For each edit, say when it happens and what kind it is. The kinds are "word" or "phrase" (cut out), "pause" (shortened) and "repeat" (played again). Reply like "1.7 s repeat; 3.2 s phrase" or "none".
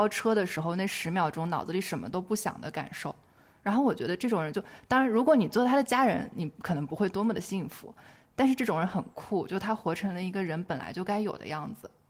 none

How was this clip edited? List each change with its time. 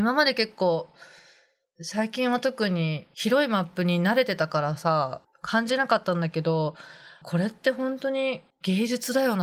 7.2 s word

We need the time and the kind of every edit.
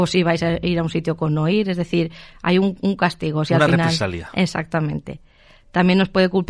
none

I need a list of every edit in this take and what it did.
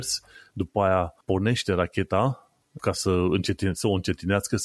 1.2 s pause; 2.8 s word

